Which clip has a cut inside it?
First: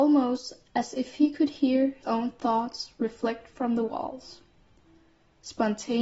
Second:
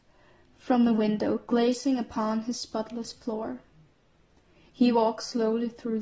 first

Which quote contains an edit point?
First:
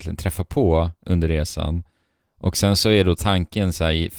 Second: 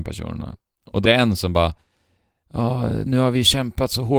second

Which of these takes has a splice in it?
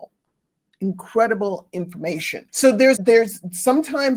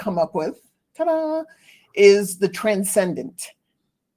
first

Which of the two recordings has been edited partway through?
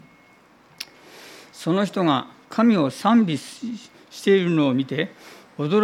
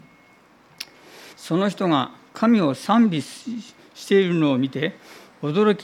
second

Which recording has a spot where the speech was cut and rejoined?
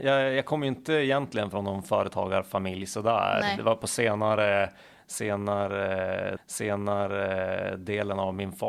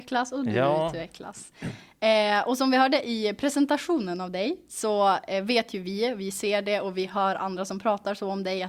first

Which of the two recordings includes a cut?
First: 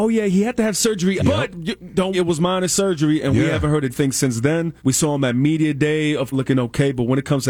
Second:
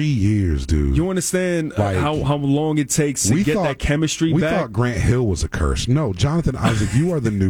first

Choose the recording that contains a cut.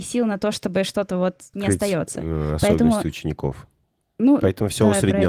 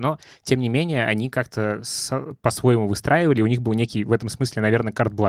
first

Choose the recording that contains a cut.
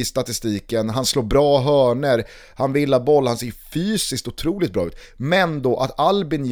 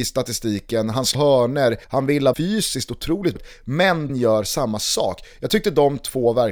second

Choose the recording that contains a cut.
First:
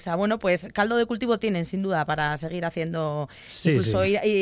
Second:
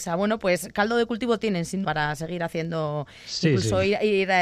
second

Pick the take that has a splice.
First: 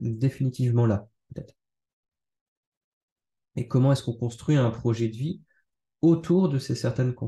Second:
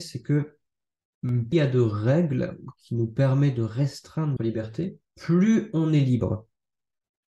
second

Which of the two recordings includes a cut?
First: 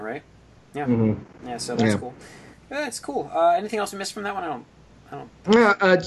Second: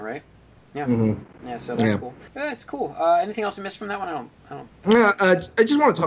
second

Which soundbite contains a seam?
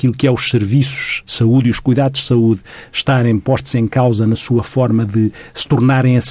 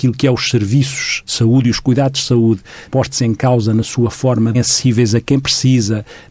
second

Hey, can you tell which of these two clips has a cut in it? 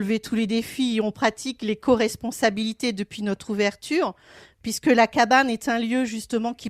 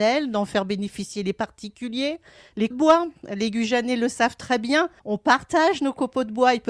second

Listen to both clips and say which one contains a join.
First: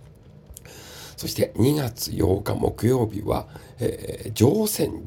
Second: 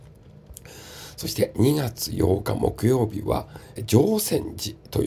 second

